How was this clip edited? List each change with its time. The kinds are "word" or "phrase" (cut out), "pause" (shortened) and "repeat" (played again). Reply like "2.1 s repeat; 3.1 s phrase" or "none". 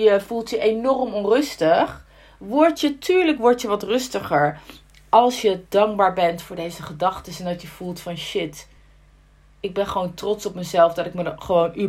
none